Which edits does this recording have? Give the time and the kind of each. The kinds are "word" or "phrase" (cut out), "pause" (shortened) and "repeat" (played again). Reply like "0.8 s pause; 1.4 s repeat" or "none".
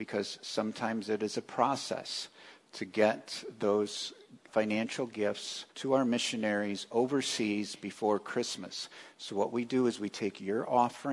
4.5 s word; 5.7 s pause